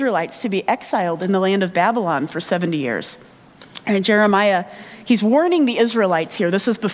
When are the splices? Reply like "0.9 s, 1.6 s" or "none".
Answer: none